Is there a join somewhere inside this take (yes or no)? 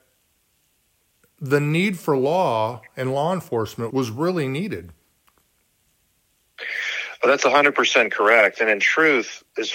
yes